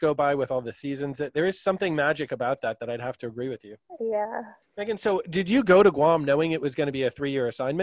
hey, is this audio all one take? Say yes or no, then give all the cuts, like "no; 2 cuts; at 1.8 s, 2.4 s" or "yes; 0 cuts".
yes; 0 cuts